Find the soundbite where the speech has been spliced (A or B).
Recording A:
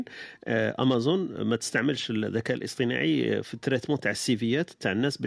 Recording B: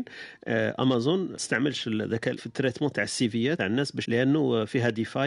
B